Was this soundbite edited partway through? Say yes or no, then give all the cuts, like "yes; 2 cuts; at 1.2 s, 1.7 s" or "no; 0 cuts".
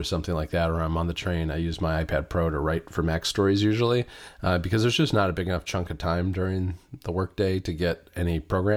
no; 0 cuts